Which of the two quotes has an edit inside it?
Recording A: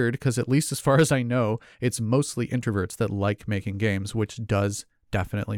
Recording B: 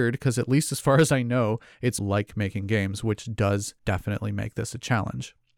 B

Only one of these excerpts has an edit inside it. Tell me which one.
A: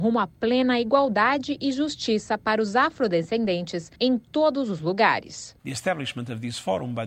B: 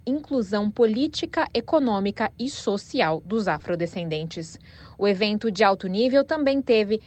A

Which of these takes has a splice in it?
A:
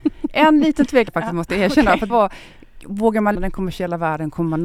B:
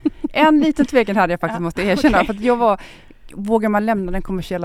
A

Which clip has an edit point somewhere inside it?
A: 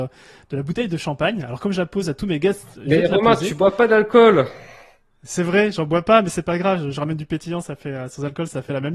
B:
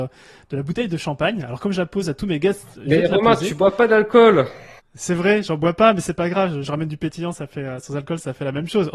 B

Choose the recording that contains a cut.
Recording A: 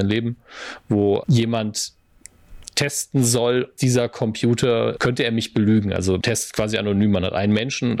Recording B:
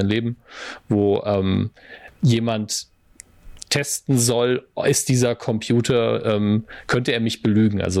A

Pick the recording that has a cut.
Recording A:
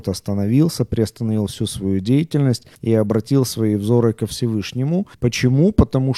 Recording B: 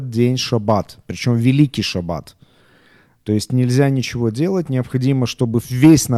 A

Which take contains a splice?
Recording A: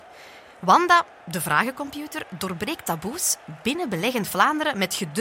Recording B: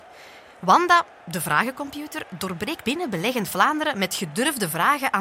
B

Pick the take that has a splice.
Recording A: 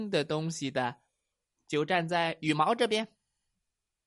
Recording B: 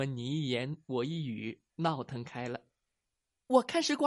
B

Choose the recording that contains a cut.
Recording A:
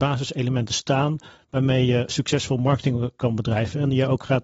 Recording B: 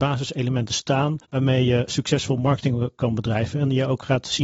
B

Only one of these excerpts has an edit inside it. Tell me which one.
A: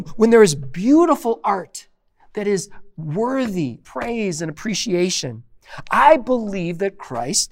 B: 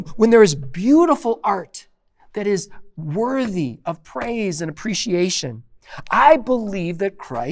A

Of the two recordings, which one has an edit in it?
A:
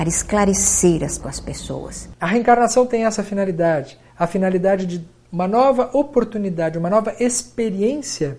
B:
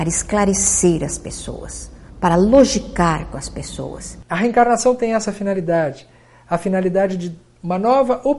A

